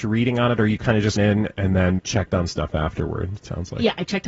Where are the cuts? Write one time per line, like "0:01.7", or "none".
0:01.2
0:02.0
0:02.5